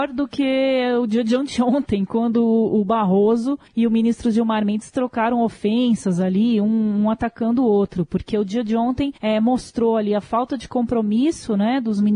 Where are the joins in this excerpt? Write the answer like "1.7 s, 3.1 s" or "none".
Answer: 3.7 s, 9.2 s